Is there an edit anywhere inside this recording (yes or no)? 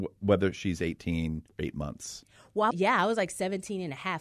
yes